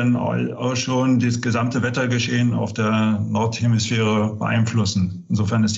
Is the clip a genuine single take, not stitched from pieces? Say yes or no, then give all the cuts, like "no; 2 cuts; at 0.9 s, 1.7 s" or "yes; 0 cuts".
yes; 0 cuts